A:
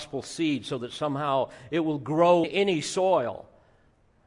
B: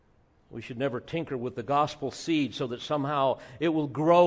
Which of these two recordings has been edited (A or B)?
A